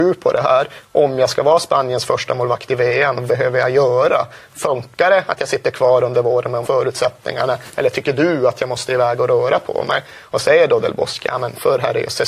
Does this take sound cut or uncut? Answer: cut